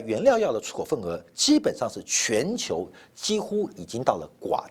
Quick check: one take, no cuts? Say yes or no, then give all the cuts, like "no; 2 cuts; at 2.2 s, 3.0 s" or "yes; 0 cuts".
yes; 0 cuts